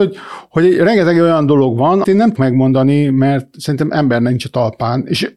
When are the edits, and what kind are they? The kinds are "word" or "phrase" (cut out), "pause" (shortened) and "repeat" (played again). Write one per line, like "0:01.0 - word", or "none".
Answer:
0:02.0 - word
0:02.4 - word